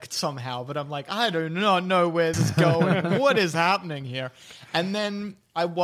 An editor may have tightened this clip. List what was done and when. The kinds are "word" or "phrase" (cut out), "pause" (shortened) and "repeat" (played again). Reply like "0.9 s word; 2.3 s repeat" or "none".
2.3 s word